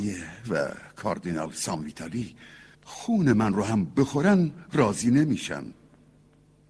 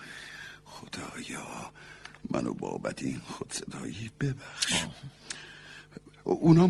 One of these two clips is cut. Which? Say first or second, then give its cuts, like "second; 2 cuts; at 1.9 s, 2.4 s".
first; 1 cut; at 2.7 s